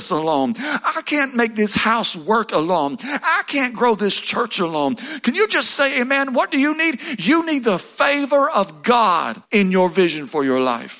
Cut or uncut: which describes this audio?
cut